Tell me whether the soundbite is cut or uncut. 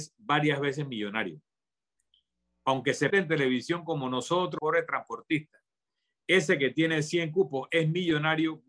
cut